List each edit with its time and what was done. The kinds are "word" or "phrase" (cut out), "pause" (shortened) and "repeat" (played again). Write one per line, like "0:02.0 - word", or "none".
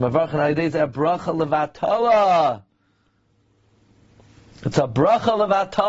none